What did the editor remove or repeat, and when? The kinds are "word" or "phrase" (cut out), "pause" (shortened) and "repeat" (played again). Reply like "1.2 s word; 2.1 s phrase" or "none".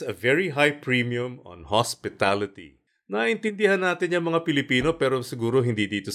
none